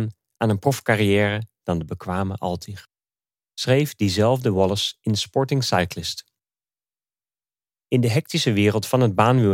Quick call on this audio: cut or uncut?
uncut